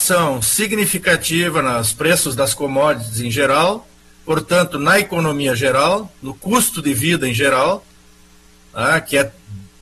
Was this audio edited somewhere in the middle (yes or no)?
no